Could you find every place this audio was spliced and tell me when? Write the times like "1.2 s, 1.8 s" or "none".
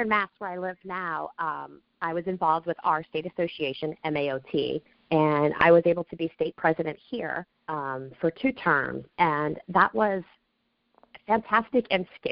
4.9 s, 7.5 s